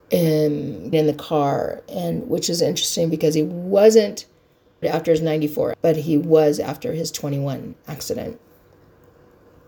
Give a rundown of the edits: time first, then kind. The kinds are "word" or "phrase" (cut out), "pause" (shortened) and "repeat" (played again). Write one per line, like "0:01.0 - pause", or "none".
0:00.9 - word
0:04.8 - word
0:05.7 - word